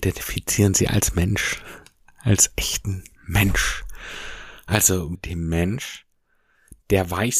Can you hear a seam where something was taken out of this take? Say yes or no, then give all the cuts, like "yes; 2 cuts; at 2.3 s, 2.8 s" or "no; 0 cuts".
yes; 1 cut; at 5.1 s